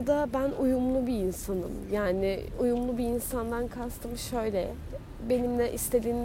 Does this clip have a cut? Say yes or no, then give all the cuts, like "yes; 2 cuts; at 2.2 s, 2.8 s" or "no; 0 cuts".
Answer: no; 0 cuts